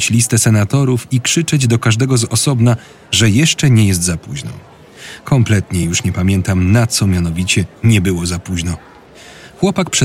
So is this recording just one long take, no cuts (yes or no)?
yes